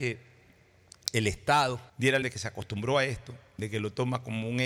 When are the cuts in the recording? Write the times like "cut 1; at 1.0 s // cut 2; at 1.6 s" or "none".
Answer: cut 1; at 1.9 s // cut 2; at 2.2 s // cut 3; at 3.5 s